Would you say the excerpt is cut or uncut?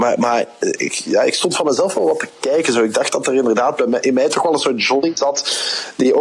uncut